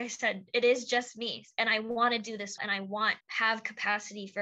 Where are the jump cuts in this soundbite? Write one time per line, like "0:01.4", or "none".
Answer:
0:02.6
0:03.2